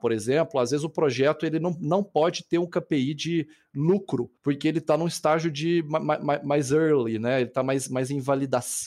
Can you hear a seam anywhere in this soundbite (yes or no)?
yes